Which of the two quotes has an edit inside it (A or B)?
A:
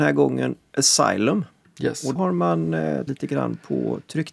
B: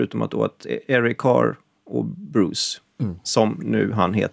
A